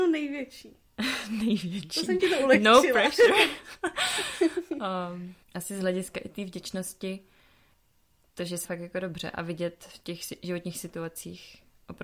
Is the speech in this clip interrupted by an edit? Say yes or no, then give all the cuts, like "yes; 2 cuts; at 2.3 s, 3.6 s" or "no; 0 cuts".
yes; 2 cuts; at 5.4 s, 8.6 s